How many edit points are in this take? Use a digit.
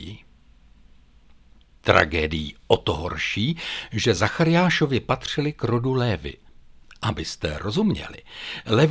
0